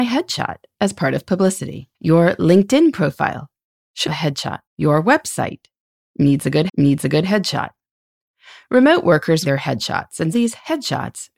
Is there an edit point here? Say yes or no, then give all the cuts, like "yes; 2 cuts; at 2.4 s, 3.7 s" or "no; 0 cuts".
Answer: yes; 6 cuts; at 1.9 s, 4.1 s, 4.7 s, 6.7 s, 9.4 s, 10.3 s